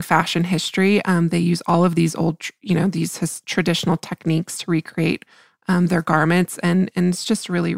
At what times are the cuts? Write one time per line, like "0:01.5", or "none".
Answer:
none